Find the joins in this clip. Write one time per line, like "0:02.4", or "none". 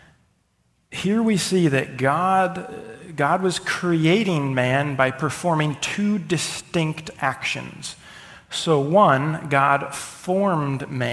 none